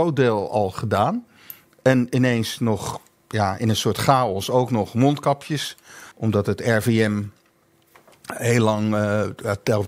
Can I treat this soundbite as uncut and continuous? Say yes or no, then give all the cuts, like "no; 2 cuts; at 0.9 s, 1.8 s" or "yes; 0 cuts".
no; 1 cut; at 6.1 s